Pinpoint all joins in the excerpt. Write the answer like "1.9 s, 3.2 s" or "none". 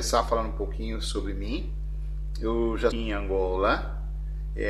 2.9 s